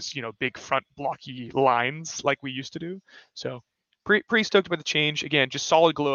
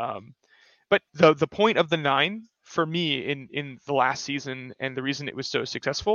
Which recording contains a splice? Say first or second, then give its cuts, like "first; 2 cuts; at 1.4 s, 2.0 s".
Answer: second; 1 cut; at 1.1 s